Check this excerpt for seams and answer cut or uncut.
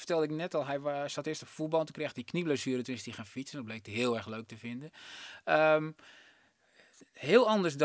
uncut